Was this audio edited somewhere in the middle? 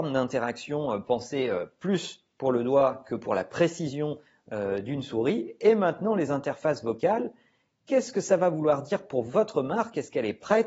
no; 0 cuts

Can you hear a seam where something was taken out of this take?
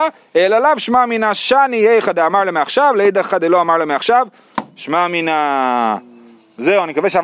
no; 0 cuts

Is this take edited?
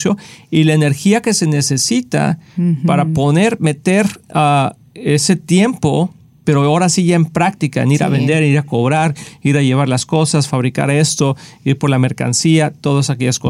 no; 0 cuts

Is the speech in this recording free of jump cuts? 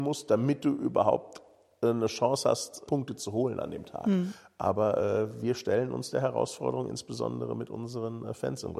no; 1 cut; at 2.8 s

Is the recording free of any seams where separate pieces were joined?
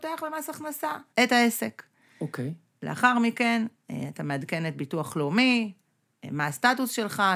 no; 1 cut; at 1.1 s

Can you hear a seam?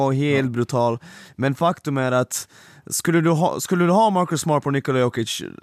no; 0 cuts

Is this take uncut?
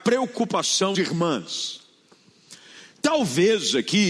no; 1 cut; at 0.9 s

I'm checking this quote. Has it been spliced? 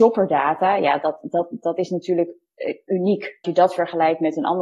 yes; 1 cut; at 3.4 s

